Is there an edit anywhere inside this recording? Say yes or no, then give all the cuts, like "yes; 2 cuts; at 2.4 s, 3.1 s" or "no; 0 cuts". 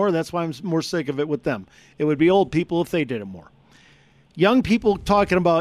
no; 0 cuts